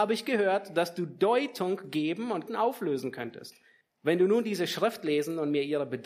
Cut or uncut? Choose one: cut